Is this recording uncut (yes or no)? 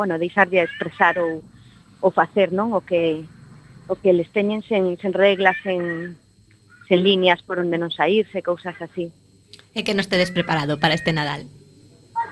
yes